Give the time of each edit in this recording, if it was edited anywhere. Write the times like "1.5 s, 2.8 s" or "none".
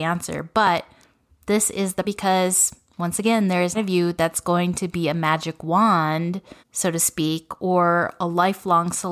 1.3 s, 2.0 s, 3.7 s, 6.6 s